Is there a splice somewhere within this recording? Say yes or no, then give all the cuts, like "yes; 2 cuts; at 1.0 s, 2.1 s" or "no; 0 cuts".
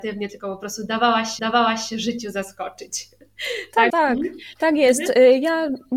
yes; 2 cuts; at 1.4 s, 3.9 s